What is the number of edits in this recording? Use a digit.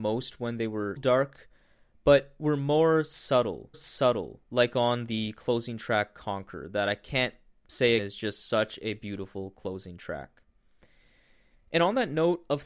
3